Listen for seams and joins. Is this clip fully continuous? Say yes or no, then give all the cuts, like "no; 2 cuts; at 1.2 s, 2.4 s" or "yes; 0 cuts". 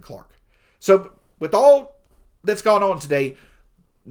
yes; 0 cuts